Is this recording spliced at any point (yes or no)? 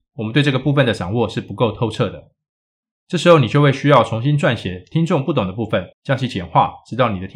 yes